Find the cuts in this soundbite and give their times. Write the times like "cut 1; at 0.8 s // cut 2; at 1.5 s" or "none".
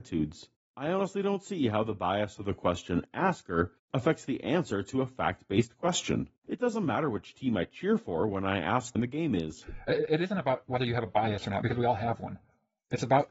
cut 1; at 6.4 s // cut 2; at 8.9 s